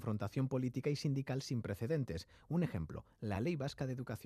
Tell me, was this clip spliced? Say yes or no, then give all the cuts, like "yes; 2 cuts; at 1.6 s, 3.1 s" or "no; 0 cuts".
no; 0 cuts